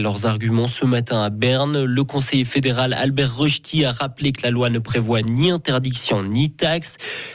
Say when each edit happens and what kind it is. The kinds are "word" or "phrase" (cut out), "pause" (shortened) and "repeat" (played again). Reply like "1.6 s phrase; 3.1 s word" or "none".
none